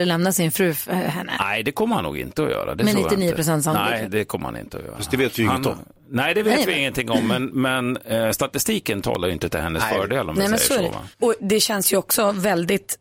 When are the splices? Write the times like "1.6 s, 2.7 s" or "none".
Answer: 11.1 s